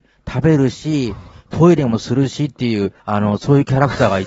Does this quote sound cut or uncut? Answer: cut